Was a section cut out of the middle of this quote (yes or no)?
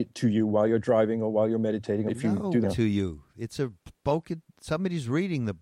yes